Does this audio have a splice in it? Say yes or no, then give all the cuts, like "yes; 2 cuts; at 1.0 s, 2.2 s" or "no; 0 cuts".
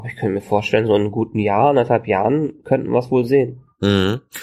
no; 0 cuts